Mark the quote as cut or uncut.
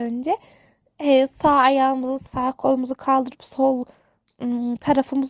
cut